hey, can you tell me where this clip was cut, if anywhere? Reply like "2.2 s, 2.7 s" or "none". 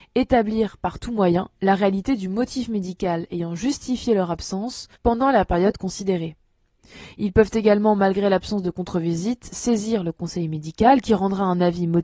5.0 s